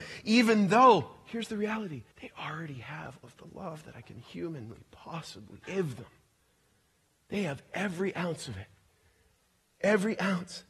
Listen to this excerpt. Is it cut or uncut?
cut